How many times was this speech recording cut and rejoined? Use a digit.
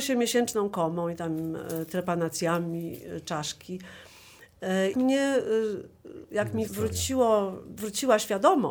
2